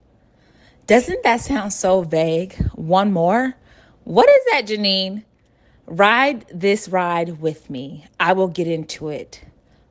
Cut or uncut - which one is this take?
uncut